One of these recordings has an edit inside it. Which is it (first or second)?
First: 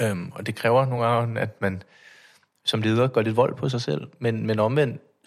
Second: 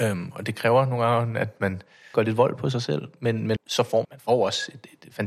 second